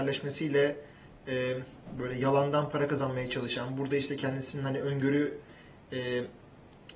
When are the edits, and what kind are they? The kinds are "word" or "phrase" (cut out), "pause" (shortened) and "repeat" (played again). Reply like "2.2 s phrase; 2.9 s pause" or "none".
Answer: none